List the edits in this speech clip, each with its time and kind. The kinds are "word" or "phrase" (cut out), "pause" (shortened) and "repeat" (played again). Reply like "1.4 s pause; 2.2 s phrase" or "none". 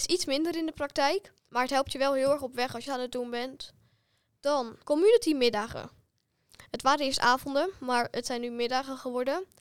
1.4 s pause; 2.9 s phrase; 4.8 s word

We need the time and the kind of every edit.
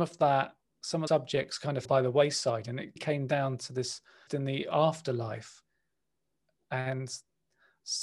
1.1 s word; 1.8 s word; 3.0 s word; 4.3 s word

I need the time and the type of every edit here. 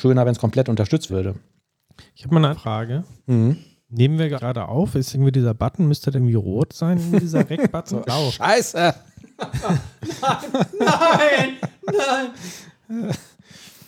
1.1 s word; 2.5 s word; 4.4 s word; 5.1 s word; 6.2 s word; 8.1 s word

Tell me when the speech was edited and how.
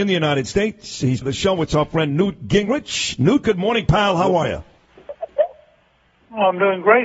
1.2 s phrase

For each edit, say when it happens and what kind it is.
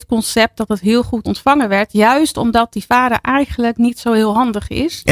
1.3 s word

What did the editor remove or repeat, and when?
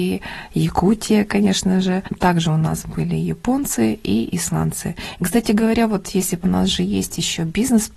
6.4 s phrase

